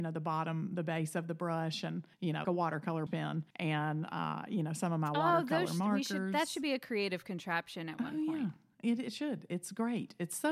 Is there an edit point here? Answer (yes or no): yes